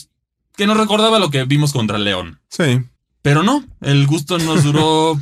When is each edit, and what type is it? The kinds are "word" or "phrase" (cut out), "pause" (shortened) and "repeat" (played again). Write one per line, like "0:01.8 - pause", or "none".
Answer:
0:03.0 - pause